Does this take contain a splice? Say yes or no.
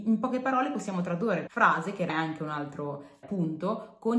yes